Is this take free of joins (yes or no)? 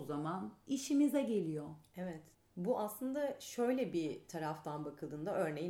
yes